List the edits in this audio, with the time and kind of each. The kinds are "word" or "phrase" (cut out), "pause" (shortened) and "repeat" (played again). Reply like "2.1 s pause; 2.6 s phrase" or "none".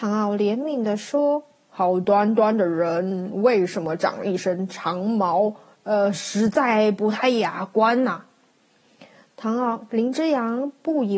none